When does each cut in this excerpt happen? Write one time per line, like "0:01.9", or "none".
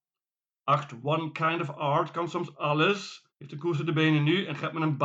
0:03.3